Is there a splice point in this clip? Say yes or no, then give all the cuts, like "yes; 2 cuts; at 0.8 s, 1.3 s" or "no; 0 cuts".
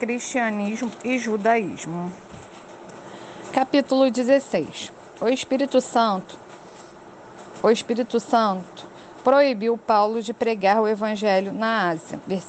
no; 0 cuts